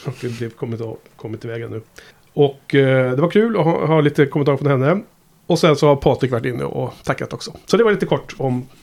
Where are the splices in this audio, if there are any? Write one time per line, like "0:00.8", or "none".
0:02.1